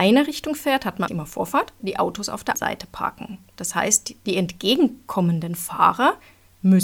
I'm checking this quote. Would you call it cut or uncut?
cut